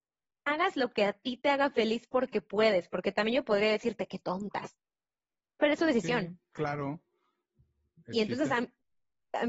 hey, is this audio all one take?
yes; 0 cuts

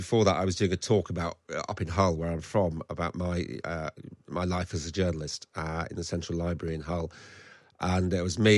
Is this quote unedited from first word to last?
yes; 0 cuts

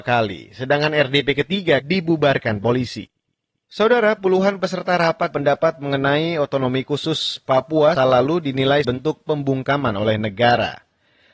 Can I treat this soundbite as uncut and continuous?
no; 5 cuts; at 1.8 s, 4.2 s, 5.3 s, 8.0 s, 8.8 s

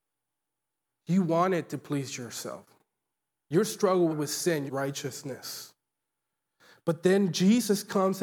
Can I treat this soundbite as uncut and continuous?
no; 3 cuts; at 3.1 s, 4.1 s, 4.7 s

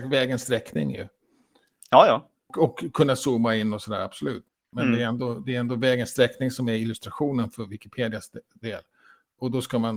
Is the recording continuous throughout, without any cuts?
yes; 0 cuts

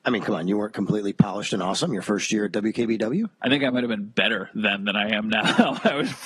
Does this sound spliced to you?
no; 0 cuts

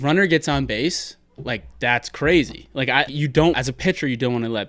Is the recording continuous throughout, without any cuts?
no; 3 cuts; at 1.3 s, 3.1 s, 3.5 s

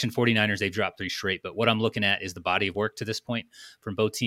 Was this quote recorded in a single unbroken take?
yes; 0 cuts

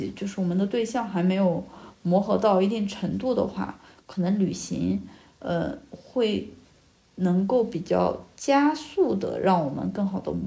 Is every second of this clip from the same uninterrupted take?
yes; 0 cuts

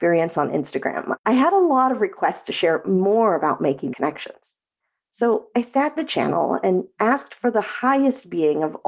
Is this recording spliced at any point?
yes; 2 cuts; at 3.9 s, 6.0 s

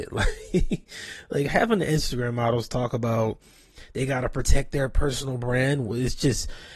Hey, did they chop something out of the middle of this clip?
no; 0 cuts

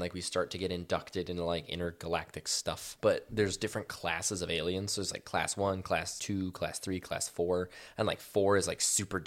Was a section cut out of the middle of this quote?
no; 0 cuts

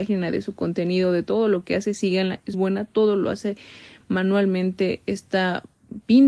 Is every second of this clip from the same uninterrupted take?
no; 1 cut; at 2.5 s

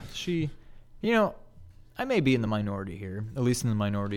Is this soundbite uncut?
yes; 0 cuts

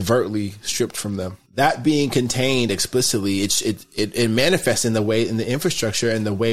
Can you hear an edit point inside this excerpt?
yes; 1 cut; at 1.4 s

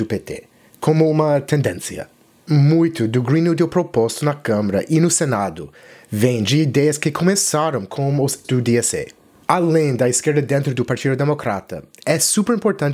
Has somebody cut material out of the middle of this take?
yes; 1 cut; at 8.4 s

